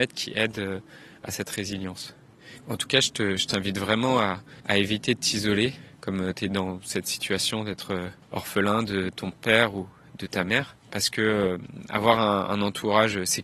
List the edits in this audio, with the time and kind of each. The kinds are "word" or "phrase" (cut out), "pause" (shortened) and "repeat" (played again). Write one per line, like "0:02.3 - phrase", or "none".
0:04.6 - pause
0:08.2 - pause